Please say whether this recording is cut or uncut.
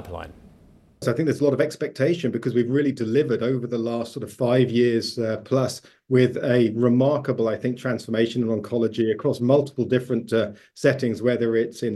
uncut